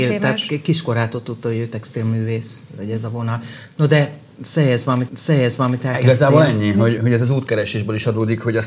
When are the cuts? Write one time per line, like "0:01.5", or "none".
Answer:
0:05.1
0:07.0